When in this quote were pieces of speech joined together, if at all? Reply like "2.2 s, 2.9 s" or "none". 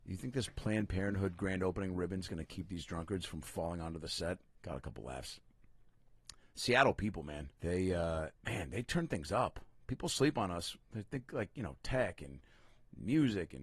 4.4 s, 7.6 s, 8.4 s